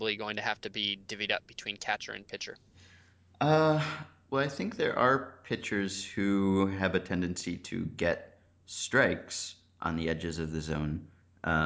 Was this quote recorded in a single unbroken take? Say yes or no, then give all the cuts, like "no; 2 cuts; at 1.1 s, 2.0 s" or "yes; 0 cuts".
yes; 0 cuts